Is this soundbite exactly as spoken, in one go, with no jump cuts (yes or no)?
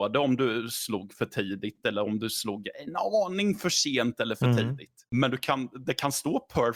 yes